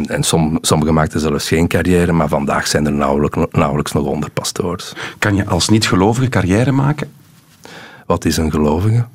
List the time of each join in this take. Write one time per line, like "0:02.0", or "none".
none